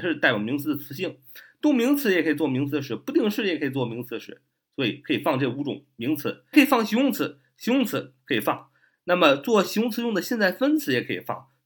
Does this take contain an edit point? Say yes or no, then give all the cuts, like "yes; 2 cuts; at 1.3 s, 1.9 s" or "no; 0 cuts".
yes; 1 cut; at 6.5 s